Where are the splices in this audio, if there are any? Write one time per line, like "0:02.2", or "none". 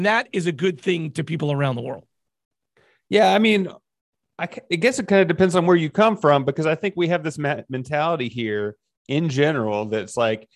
none

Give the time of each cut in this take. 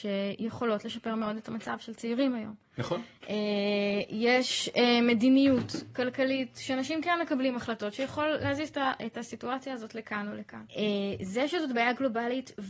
0:10.7

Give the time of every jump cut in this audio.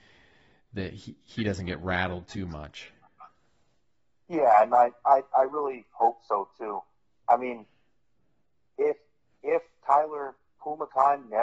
none

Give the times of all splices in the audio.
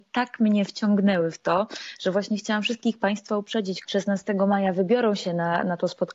0:03.8

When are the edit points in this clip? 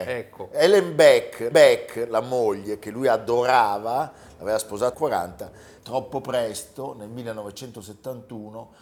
0:01.5
0:04.9
0:05.8

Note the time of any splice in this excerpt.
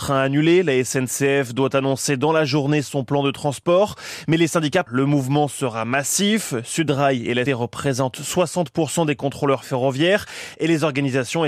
0:04.9
0:07.5

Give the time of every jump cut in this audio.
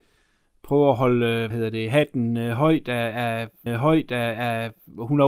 0:01.5
0:03.7

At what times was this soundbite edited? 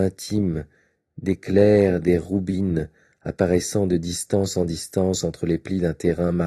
none

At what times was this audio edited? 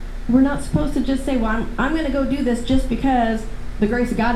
none

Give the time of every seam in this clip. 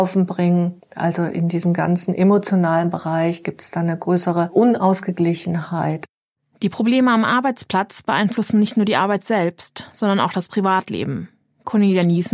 none

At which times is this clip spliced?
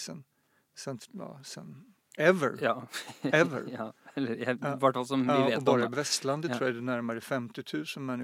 none

